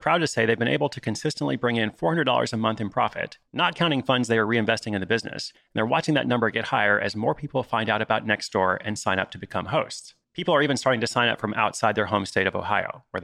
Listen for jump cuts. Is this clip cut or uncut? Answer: cut